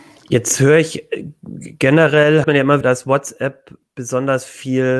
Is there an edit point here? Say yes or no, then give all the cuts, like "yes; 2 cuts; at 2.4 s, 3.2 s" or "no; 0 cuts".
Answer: yes; 2 cuts; at 2.4 s, 2.8 s